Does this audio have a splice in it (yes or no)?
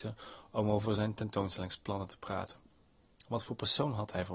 no